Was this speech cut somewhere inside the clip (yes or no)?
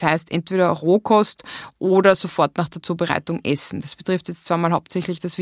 no